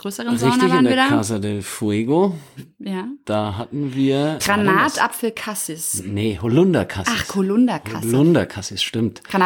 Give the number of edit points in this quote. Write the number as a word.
one